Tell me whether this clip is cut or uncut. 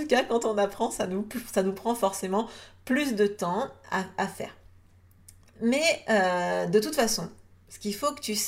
uncut